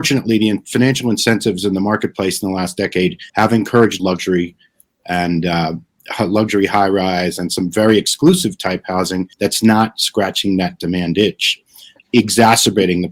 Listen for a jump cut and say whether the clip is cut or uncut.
cut